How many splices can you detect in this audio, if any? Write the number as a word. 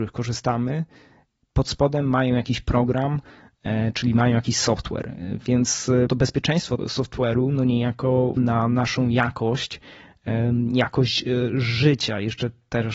three